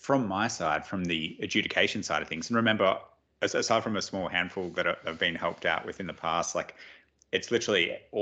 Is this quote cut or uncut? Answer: uncut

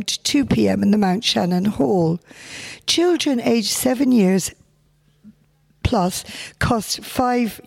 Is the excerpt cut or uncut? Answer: uncut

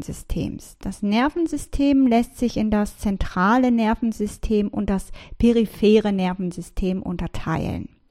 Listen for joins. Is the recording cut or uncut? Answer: uncut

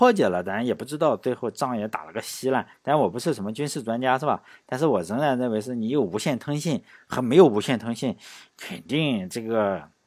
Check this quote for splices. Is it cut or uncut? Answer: uncut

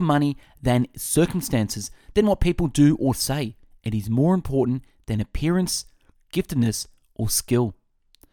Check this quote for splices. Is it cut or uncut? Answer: uncut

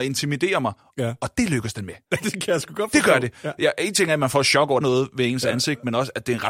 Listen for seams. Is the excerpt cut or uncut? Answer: cut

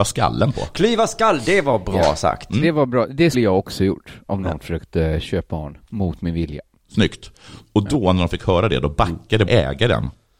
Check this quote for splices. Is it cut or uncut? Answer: cut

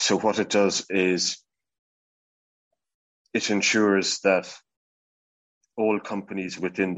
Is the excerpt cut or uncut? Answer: uncut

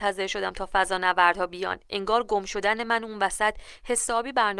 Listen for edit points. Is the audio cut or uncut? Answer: uncut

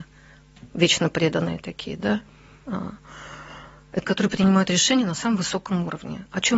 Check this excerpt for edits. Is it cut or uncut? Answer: cut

